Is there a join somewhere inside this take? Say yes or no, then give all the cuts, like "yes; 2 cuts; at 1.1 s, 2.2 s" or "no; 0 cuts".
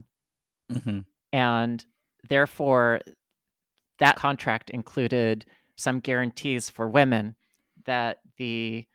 yes; 3 cuts; at 1.1 s, 4.1 s, 5.8 s